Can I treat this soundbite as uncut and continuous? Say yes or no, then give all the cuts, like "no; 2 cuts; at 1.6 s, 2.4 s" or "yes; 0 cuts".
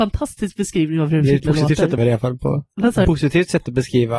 no; 2 cuts; at 2.0 s, 3.0 s